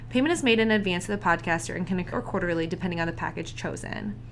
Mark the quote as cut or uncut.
cut